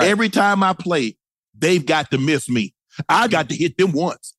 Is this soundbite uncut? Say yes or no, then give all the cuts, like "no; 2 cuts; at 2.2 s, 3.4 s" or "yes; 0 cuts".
no; 1 cut; at 3.3 s